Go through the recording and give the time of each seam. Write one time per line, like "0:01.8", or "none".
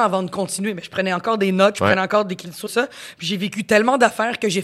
0:02.7